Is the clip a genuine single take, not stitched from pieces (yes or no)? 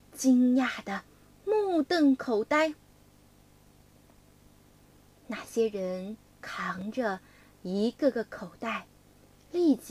no